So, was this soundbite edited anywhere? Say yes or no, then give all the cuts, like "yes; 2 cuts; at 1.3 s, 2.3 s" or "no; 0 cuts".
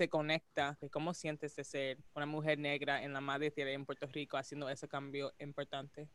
yes; 1 cut; at 2.1 s